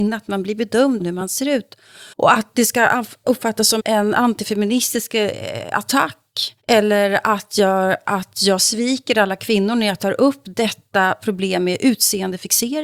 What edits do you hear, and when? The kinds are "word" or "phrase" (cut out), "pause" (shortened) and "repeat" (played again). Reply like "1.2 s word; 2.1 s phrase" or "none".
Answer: 1.0 s word; 2.1 s pause; 3.8 s word; 6.6 s pause